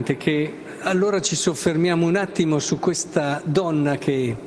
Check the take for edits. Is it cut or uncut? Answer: uncut